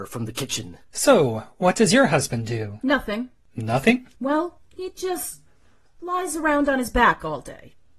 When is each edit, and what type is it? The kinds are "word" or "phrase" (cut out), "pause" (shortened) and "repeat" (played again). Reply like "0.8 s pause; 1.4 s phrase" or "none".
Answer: 4.1 s pause